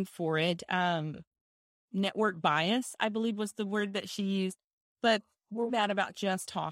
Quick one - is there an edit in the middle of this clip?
yes; 1 cut; at 5.7 s

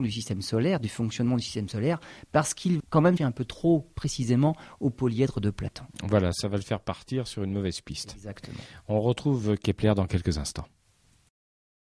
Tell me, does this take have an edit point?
yes; 2 cuts; at 2.8 s, 3.2 s

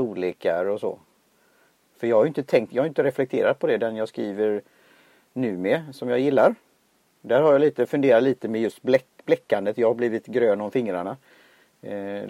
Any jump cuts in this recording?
no; 0 cuts

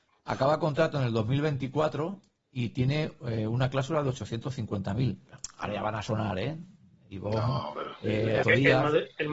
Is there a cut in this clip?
yes; 1 cut; at 8.4 s

